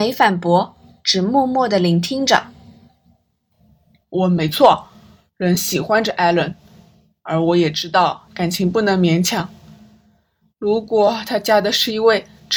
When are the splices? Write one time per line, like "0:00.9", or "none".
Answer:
none